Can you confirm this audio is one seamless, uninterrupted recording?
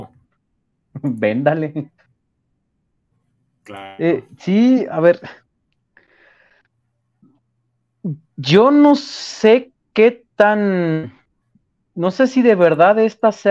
yes; 0 cuts

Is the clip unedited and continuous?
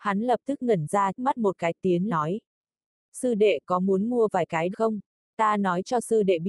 no; 3 cuts; at 1.2 s, 2.1 s, 4.7 s

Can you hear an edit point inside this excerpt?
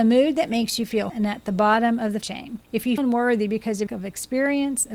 yes; 5 cuts; at 1.1 s, 2.2 s, 2.6 s, 3.0 s, 3.9 s

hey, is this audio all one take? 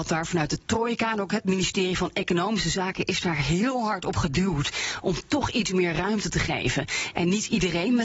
yes; 0 cuts

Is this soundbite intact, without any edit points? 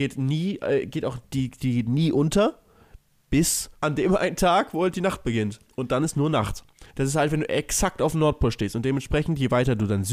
no; 2 cuts; at 3.7 s, 6.9 s

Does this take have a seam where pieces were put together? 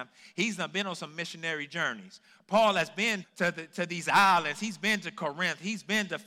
yes; 1 cut; at 3.2 s

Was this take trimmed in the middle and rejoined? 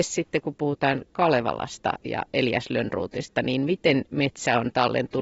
no; 0 cuts

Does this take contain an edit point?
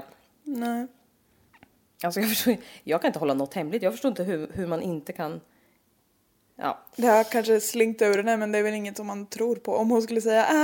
no; 0 cuts

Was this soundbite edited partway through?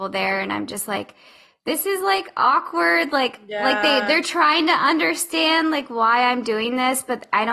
no; 0 cuts

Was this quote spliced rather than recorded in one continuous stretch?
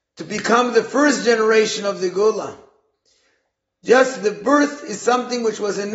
no; 0 cuts

